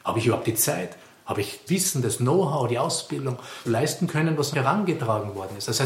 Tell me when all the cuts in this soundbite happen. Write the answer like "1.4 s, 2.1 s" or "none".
1.7 s, 3.6 s, 4.1 s, 4.5 s